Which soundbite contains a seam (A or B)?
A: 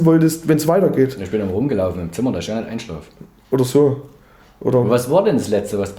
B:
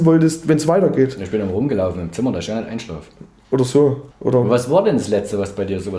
B